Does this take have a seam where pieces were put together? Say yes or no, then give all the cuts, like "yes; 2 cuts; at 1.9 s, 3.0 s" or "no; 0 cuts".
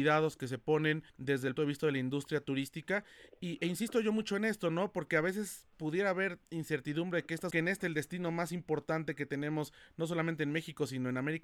yes; 3 cuts; at 1.1 s, 1.6 s, 7.5 s